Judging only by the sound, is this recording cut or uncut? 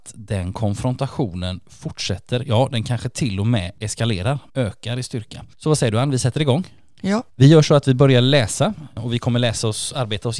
cut